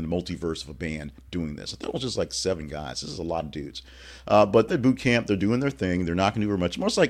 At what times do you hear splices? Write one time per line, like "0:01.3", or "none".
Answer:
0:04.7

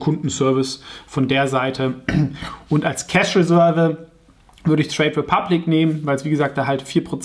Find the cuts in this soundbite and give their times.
none

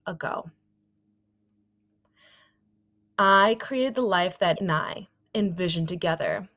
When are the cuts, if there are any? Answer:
0:04.6

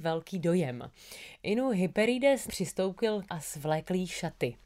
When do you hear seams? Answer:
0:02.5
0:03.3

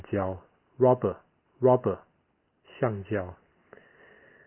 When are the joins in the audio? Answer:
0:01.5

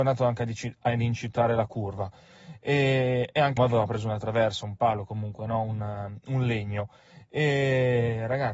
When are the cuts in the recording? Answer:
0:03.6

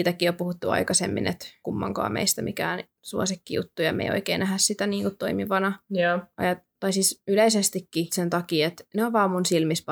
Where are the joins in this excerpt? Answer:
0:01.6
0:05.9
0:08.1

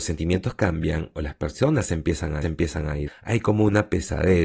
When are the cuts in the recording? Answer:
0:02.4
0:03.1

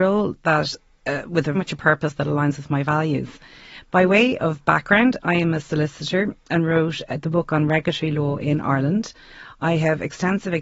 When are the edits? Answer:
0:01.5

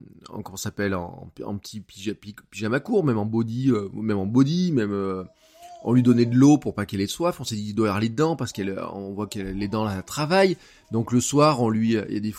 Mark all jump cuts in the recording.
none

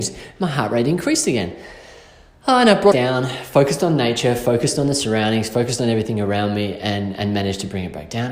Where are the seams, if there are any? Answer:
0:02.9

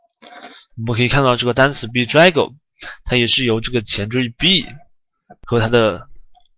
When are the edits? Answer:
none

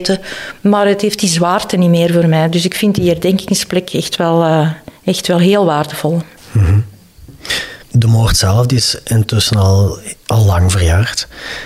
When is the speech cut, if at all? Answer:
0:05.0
0:07.8

